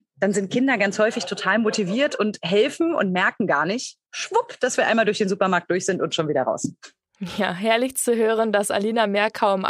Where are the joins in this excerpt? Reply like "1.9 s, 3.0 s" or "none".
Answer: 4.0 s